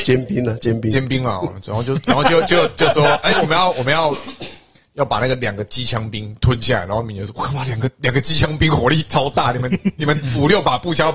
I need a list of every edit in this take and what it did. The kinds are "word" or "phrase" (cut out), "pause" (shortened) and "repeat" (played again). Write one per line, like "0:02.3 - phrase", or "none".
none